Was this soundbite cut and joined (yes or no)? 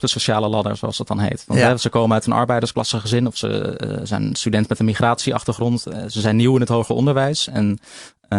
no